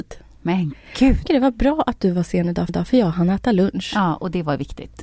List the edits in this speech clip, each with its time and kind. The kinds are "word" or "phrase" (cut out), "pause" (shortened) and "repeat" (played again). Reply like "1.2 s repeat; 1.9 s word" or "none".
1.3 s phrase; 2.7 s repeat